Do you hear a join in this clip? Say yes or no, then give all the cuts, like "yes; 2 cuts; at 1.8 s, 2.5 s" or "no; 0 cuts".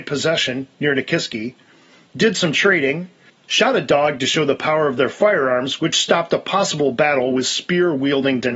no; 0 cuts